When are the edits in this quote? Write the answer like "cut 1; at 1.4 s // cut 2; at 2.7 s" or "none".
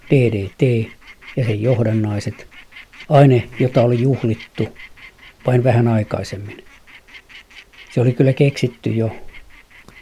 cut 1; at 7.9 s